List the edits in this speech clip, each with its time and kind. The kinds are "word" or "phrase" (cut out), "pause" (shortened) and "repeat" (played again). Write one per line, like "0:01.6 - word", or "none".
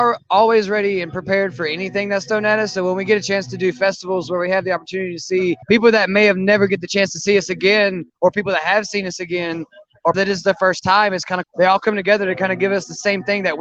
0:05.6 - pause
0:08.1 - pause
0:10.1 - word
0:11.4 - phrase